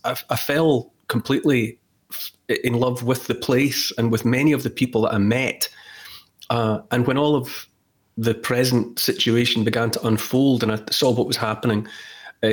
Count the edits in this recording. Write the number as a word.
zero